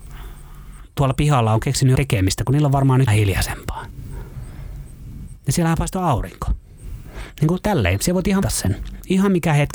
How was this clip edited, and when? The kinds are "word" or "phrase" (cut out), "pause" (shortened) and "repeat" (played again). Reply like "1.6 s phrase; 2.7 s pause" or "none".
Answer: 2.0 s word; 3.1 s word; 8.4 s word